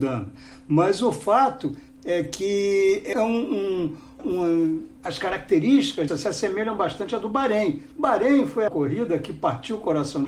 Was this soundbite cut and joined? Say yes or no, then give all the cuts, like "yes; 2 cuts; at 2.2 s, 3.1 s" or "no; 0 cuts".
yes; 6 cuts; at 3.1 s, 4.2 s, 5.0 s, 6.1 s, 7.9 s, 8.7 s